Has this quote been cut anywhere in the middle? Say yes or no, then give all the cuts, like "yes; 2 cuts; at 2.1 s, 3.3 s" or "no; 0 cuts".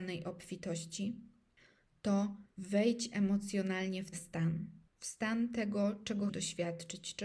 yes; 4 cuts; at 2.5 s, 4.1 s, 4.9 s, 6.3 s